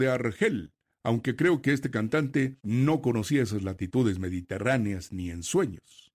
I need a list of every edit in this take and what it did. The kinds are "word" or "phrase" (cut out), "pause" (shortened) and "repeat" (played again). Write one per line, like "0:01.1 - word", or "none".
0:02.6 - pause